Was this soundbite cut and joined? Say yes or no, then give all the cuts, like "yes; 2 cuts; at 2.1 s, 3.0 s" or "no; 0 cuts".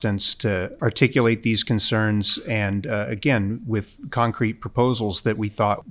no; 0 cuts